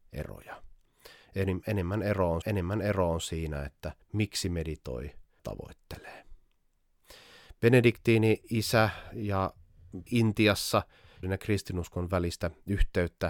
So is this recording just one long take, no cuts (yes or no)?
no